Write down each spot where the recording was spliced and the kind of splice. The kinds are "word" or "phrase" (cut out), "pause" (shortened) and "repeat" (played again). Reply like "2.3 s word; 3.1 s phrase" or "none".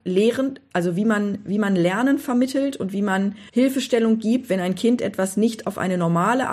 3.5 s pause